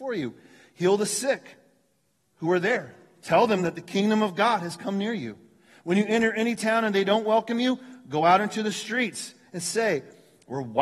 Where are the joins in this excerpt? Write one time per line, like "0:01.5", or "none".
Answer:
none